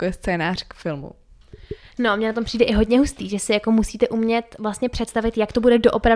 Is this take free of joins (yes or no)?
yes